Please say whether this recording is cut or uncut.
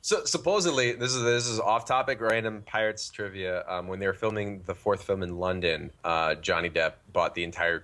cut